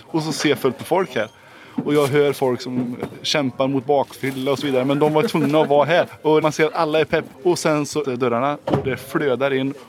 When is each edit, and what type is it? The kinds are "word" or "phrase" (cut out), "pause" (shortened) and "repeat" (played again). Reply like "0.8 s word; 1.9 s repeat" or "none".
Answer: 6.4 s word; 7.3 s pause; 8.0 s word